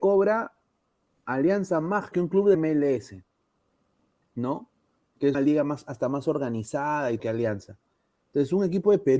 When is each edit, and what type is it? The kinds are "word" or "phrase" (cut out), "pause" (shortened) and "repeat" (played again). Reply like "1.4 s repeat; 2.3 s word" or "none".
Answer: 2.1 s word; 2.5 s word; 5.3 s word; 7.2 s word